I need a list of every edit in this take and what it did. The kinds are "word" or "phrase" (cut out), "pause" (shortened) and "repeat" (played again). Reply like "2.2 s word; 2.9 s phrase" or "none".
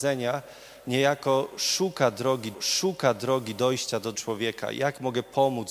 2.5 s repeat; 4.1 s word